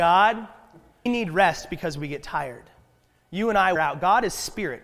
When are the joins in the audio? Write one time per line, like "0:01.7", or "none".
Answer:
0:01.1
0:03.8